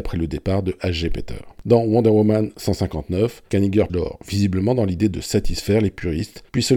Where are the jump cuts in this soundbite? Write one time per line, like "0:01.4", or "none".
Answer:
0:03.9